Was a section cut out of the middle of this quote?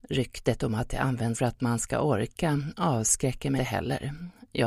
yes; 2 cuts; at 1.3 s, 3.6 s

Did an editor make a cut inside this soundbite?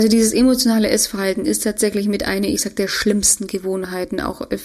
no; 0 cuts

